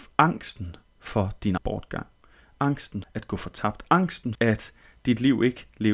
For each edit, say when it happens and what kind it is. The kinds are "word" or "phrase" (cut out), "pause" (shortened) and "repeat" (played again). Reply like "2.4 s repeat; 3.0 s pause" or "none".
1.6 s word; 3.0 s word; 4.3 s word